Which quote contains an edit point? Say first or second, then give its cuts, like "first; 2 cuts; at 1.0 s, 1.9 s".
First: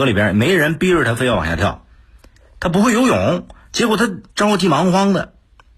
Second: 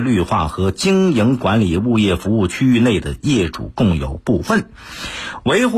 first; 1 cut; at 4.3 s